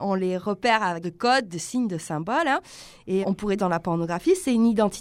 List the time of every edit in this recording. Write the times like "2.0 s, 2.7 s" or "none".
1.0 s, 3.2 s, 3.6 s